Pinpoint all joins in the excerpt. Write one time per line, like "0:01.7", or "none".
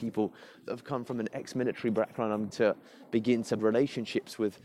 0:02.5
0:03.6